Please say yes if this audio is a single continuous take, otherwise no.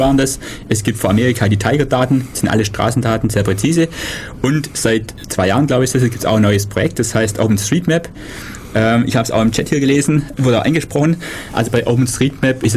no